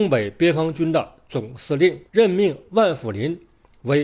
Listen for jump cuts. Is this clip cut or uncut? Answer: cut